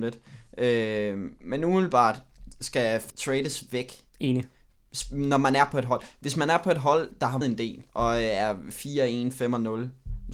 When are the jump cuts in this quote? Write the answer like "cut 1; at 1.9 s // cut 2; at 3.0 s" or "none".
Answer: cut 1; at 1.4 s // cut 2; at 3.1 s // cut 3; at 4.1 s // cut 4; at 7.4 s // cut 5; at 7.9 s